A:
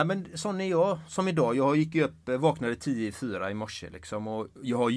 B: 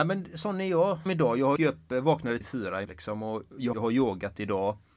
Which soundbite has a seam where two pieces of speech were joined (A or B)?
B